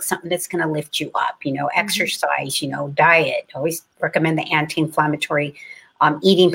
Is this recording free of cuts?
no; 1 cut; at 3.9 s

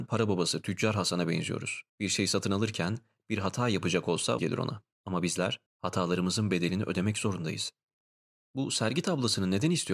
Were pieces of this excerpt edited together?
yes; 4 cuts; at 1.9 s, 4.4 s, 4.9 s, 5.7 s

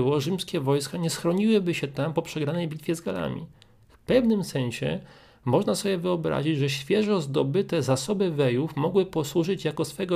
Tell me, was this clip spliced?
no; 0 cuts

